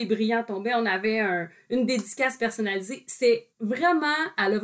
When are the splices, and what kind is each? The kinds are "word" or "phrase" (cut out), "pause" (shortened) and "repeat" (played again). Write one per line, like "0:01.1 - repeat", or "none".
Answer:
0:03.5 - pause